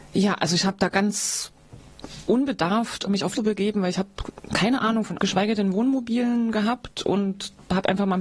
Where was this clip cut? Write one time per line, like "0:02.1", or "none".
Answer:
0:03.1
0:03.4
0:05.2